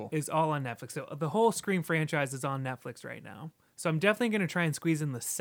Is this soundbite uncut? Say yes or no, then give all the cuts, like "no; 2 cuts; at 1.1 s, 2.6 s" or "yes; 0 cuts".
yes; 0 cuts